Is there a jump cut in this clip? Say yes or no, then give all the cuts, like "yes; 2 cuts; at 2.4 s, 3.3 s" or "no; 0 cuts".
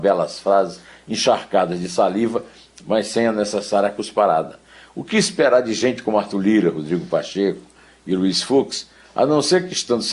no; 0 cuts